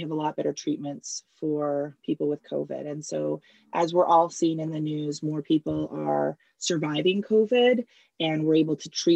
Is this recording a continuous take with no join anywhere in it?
yes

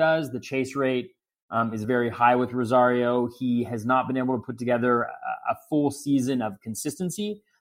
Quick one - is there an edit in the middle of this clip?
no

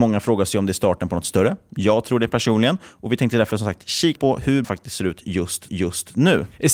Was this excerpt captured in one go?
no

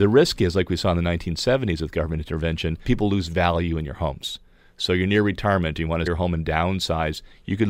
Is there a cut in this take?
yes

